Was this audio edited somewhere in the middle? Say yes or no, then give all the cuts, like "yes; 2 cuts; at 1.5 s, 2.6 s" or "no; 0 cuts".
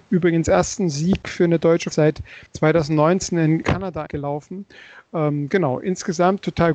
yes; 4 cuts; at 1.9 s, 2.5 s, 3.6 s, 4.1 s